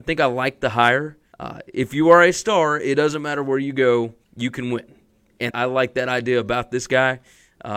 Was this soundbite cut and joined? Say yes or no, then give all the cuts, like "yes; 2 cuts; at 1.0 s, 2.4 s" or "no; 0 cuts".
yes; 3 cuts; at 1.3 s, 4.2 s, 5.5 s